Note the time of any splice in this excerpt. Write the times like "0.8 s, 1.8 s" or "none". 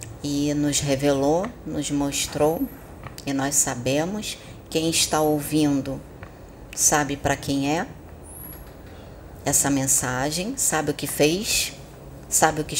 none